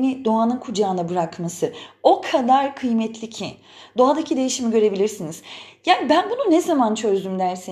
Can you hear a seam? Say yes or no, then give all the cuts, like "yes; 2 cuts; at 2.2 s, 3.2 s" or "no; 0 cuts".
no; 0 cuts